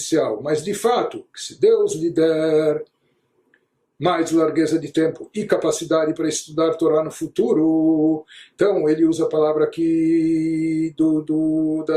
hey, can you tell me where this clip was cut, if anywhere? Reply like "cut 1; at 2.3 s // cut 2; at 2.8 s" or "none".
none